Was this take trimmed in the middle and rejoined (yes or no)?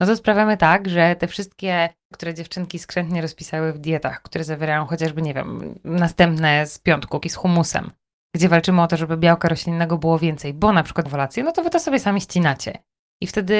yes